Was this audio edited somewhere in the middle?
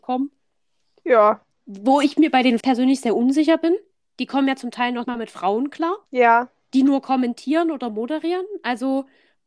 yes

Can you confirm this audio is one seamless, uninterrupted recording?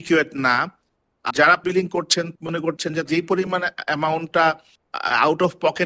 no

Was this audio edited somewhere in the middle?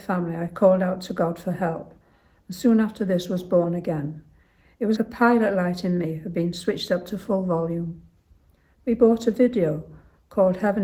yes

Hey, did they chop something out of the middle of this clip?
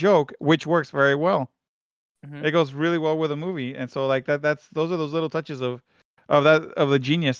no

